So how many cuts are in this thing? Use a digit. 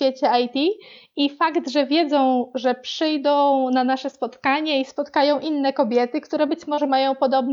0